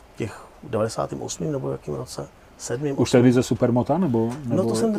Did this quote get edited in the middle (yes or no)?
no